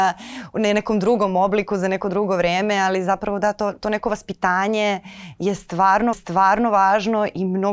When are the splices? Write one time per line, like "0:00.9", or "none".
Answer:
0:06.1